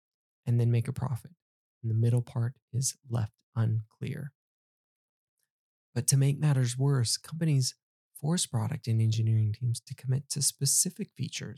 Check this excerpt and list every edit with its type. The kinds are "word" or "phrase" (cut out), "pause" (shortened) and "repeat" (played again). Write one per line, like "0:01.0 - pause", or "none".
0:02.6 - pause